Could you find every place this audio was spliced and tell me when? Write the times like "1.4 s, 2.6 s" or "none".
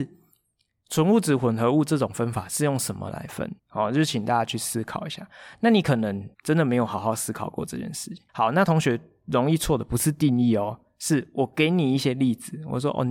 3.6 s, 6.3 s, 8.3 s